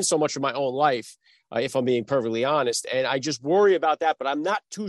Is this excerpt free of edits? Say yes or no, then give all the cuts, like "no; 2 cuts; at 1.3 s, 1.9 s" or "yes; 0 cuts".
yes; 0 cuts